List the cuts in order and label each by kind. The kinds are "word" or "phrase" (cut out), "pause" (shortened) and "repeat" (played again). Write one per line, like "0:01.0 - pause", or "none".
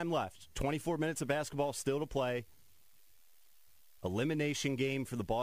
none